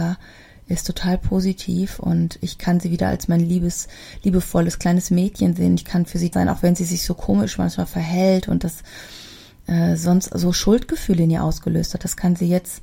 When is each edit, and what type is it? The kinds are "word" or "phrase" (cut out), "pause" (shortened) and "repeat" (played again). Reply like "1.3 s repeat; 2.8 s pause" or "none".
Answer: 6.3 s word